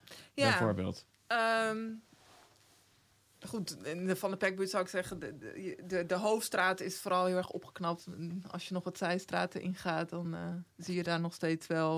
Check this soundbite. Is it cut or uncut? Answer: cut